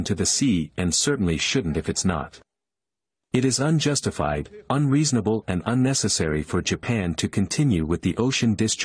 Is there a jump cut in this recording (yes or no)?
no